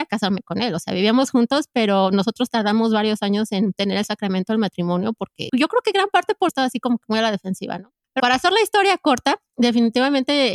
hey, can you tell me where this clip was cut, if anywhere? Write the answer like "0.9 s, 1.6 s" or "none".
5.5 s, 6.5 s, 8.2 s